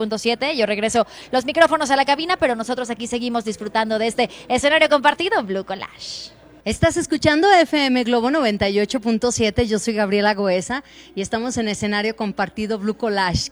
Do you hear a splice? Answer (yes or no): no